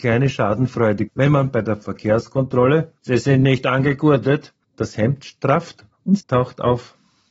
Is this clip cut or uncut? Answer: cut